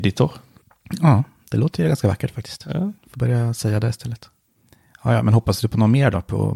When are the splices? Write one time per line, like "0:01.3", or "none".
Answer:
0:03.0